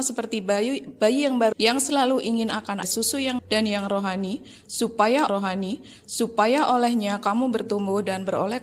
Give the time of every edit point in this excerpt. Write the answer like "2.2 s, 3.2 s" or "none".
1.5 s, 2.8 s, 3.4 s, 5.3 s

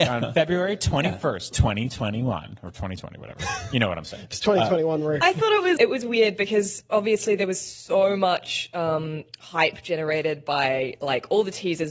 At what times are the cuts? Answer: 5.8 s

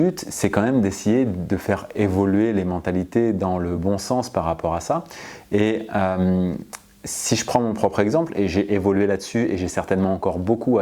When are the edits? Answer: none

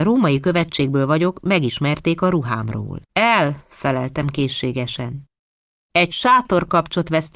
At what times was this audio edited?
3.0 s

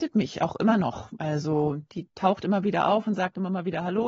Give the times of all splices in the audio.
none

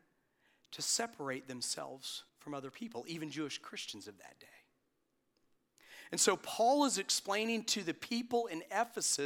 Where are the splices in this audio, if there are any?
2.3 s

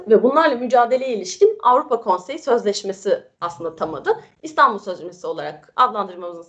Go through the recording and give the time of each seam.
3.3 s

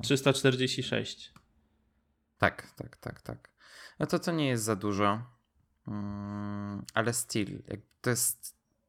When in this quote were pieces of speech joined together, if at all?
none

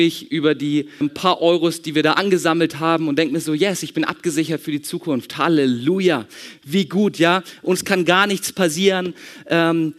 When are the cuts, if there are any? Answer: 1.0 s

